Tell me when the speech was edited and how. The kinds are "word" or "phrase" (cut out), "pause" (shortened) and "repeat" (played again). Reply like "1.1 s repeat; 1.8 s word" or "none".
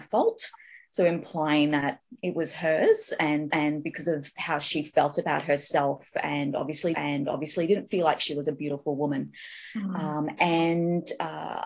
3.5 s repeat; 6.9 s repeat